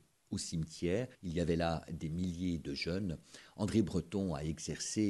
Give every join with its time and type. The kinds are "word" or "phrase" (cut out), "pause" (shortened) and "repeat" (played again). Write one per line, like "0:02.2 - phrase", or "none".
0:01.1 - pause